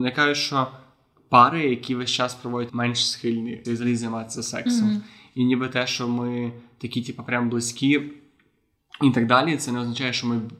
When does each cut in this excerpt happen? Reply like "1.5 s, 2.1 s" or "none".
2.7 s, 3.6 s